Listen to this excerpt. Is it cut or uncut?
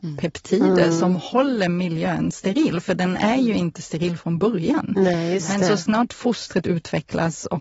uncut